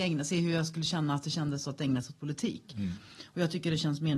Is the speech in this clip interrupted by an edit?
no; 0 cuts

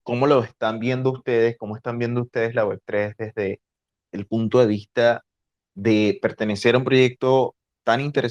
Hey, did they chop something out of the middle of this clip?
no; 0 cuts

